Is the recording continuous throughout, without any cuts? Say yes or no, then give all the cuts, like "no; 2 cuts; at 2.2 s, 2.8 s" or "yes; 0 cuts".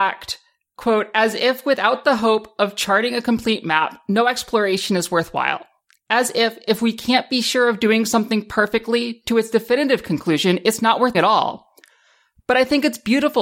no; 1 cut; at 11.1 s